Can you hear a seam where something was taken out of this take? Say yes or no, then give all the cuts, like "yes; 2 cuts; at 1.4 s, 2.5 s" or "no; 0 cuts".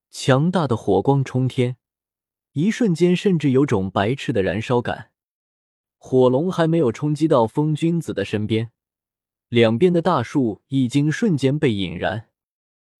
no; 0 cuts